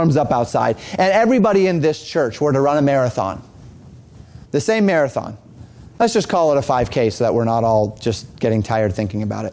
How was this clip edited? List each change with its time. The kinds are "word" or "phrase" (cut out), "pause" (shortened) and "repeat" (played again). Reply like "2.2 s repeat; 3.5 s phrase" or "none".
4.4 s pause; 5.9 s pause